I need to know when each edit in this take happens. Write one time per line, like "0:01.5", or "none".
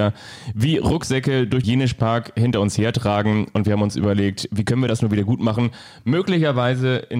0:01.6